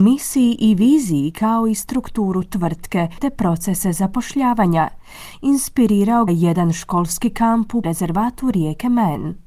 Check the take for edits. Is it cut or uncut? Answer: cut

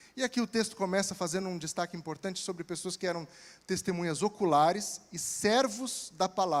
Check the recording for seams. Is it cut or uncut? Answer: uncut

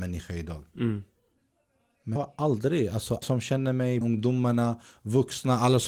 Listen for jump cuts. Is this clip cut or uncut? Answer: cut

